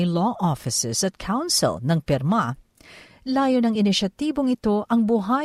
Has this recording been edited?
no; 0 cuts

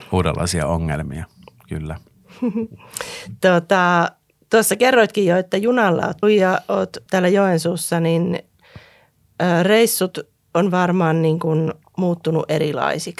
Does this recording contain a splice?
yes; 2 cuts; at 6.2 s, 7.1 s

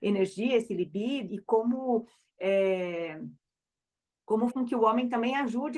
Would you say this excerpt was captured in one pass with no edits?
no; 2 cuts; at 1.3 s, 4.5 s

